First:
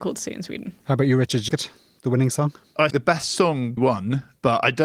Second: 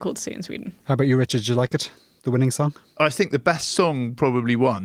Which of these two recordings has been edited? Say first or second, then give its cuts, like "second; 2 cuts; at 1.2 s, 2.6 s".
first; 3 cuts; at 1.5 s, 2.9 s, 3.8 s